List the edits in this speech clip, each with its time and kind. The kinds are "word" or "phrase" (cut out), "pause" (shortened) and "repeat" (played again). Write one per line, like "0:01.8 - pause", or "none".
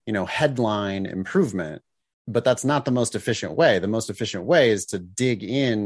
none